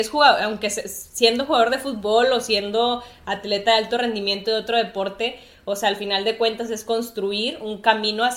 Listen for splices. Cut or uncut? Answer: uncut